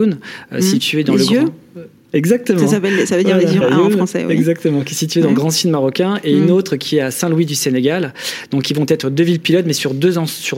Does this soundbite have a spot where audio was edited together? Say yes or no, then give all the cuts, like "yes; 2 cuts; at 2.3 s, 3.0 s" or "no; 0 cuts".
yes; 1 cut; at 3.6 s